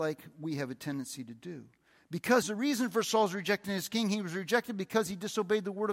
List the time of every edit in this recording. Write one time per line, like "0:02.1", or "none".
0:02.4